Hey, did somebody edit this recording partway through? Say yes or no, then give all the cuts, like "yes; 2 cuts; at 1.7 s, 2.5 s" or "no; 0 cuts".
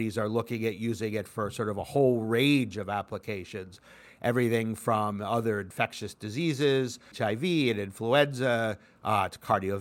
yes; 1 cut; at 7.1 s